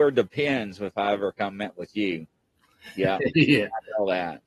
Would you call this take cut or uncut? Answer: uncut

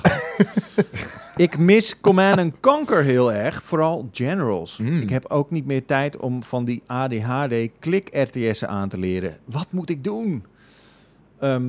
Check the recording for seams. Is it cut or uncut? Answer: uncut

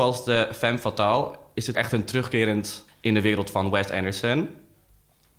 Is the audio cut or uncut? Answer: cut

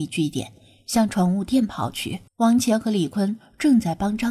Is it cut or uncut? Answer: cut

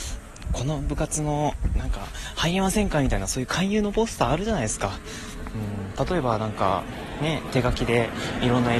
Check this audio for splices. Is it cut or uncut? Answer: uncut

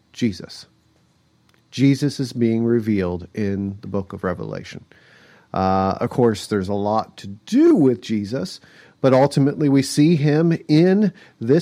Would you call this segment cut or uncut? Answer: uncut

